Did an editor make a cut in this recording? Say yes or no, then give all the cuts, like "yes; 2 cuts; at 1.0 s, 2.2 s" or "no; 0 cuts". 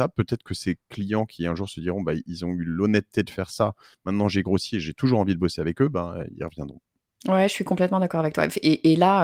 no; 0 cuts